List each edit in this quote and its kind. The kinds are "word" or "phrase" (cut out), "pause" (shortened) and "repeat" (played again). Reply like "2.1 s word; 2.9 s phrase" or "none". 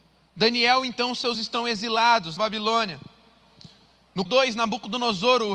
1.3 s word; 2.4 s word; 4.3 s word